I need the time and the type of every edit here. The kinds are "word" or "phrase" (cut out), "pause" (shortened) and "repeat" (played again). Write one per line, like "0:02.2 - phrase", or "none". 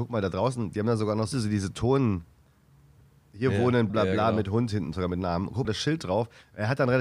0:01.3 - phrase
0:03.9 - word
0:04.9 - word
0:05.6 - phrase